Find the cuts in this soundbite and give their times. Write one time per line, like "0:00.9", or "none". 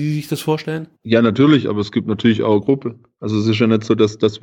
0:00.9
0:02.6